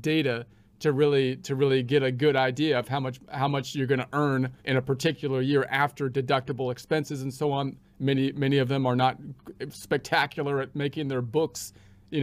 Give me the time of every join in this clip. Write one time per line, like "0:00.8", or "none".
0:04.6